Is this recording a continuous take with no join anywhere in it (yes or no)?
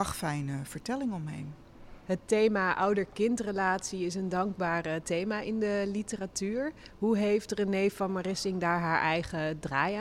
yes